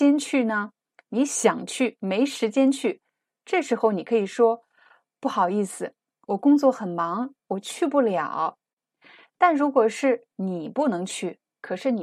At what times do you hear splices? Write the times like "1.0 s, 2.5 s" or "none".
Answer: 10.3 s